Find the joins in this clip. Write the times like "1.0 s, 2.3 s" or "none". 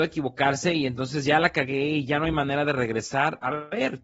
none

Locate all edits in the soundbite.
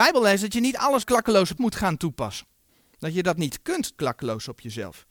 1.0 s, 1.6 s, 4.0 s

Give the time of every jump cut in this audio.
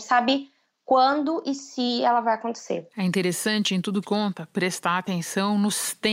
4.0 s

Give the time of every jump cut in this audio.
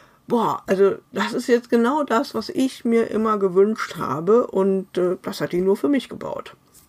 1.1 s

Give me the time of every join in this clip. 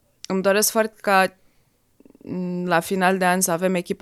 0.9 s

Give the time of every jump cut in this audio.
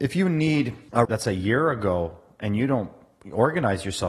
1.0 s

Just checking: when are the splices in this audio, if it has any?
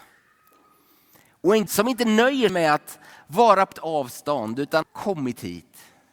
1.7 s, 2.5 s, 3.7 s, 4.8 s

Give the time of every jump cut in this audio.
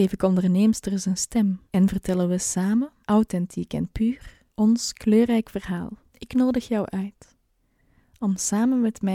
1.7 s, 3.0 s, 4.5 s, 6.1 s

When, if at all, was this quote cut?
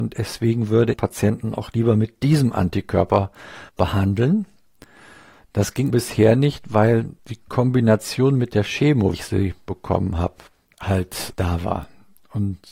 0.9 s, 3.7 s, 5.9 s, 7.2 s, 9.1 s, 11.3 s

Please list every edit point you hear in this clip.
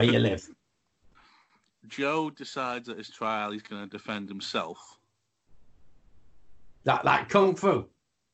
6.8 s

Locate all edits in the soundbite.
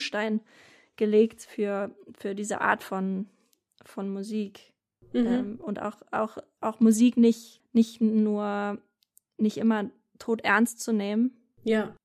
none

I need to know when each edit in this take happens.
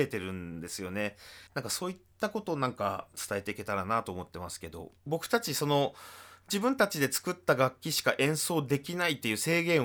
1.5 s, 5.0 s

